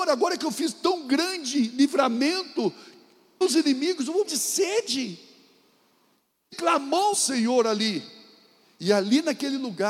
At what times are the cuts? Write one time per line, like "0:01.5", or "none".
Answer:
0:03.4
0:04.2
0:06.5
0:07.1